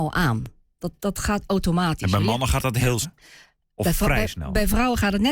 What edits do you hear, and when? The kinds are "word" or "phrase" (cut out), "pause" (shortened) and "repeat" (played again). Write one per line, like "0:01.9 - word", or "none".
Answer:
0:03.0 - word